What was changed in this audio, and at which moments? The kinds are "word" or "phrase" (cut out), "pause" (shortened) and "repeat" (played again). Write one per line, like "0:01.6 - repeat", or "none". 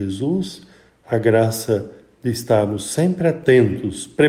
none